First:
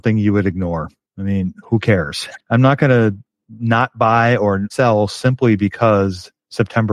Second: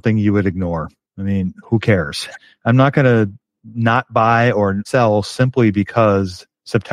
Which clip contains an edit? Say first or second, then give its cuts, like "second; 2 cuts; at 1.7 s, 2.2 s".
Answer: first; 1 cut; at 2.4 s